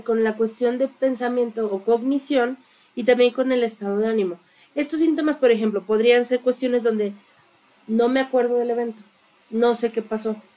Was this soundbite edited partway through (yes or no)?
no